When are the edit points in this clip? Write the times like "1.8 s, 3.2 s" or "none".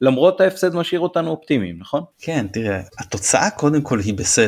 2.1 s, 2.9 s